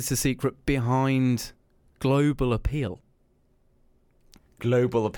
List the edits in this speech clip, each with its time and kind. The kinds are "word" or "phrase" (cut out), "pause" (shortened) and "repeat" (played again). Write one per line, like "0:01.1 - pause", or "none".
none

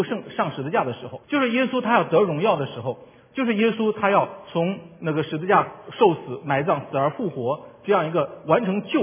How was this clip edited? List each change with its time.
0:01.2 - pause

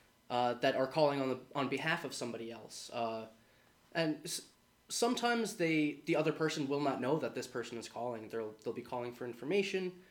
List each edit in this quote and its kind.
0:04.5 - pause

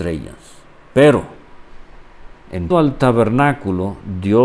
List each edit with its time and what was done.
0:02.7 - word

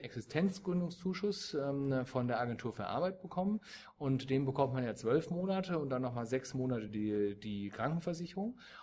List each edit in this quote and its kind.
none

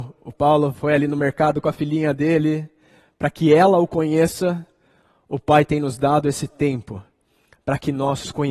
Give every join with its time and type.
none

